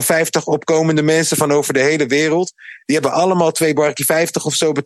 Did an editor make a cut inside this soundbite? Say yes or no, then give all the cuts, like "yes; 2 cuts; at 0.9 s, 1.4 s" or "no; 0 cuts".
no; 0 cuts